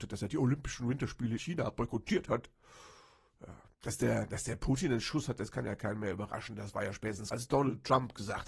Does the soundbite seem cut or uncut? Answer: cut